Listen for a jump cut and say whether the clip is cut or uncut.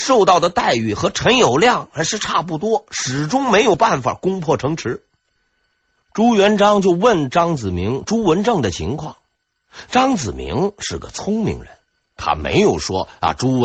uncut